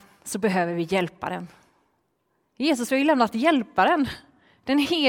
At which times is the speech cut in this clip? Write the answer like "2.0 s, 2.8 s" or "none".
none